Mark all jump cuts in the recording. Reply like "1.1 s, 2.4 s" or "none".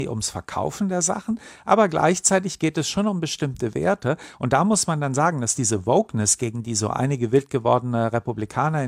none